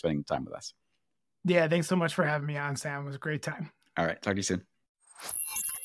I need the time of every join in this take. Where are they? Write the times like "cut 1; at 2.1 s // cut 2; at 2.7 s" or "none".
none